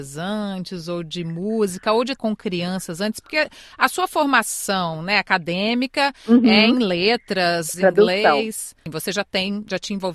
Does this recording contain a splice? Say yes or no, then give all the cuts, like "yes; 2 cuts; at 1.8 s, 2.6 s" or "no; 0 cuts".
yes; 2 cuts; at 2.2 s, 7.7 s